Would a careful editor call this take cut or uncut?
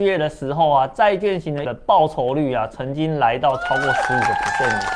cut